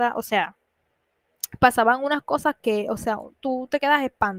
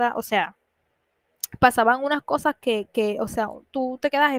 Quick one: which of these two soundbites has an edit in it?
first; 1 cut; at 2.6 s

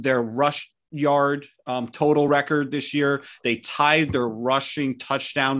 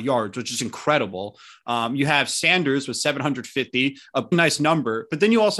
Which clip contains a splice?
second; 1 cut; at 4.3 s

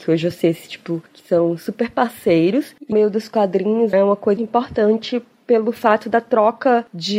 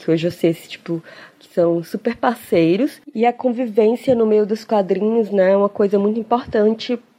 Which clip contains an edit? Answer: first; 4 cuts; at 1.1 s, 2.9 s, 3.9 s, 4.4 s

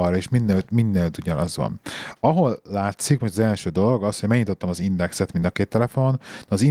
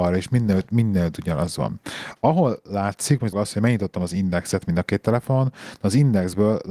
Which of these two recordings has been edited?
second; 1 cut; at 3.3 s

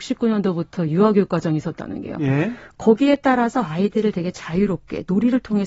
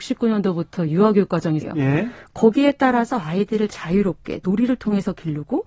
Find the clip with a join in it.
second; 2 cuts; at 1.6 s, 3.7 s

